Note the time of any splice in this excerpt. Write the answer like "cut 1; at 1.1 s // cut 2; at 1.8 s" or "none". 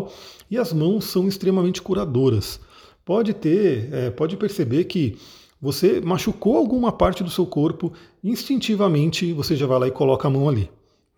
none